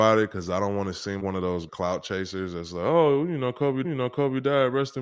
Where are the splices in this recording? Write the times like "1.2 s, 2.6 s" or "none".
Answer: 1.2 s, 1.7 s, 3.8 s